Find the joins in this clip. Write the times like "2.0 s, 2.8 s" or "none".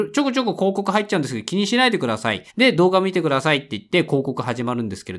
2.5 s